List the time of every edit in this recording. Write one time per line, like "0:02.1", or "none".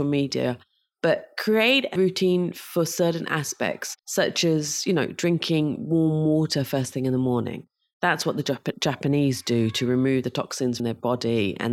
0:02.0
0:04.0
0:10.8